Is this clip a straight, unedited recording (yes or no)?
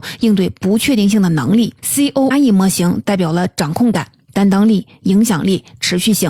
no